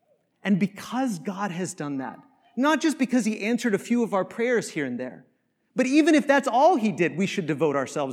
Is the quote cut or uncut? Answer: uncut